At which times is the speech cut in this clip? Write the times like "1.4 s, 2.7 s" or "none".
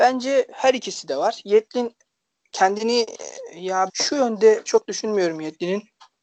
3.9 s, 4.7 s